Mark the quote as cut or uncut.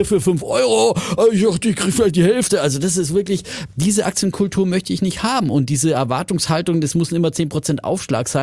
uncut